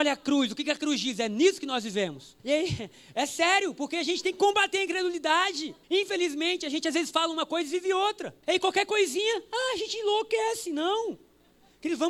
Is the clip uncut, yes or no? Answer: no